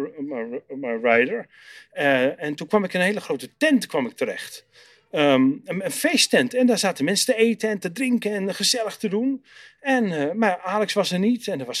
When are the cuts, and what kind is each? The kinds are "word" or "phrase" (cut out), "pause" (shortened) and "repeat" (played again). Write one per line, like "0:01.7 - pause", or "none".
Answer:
none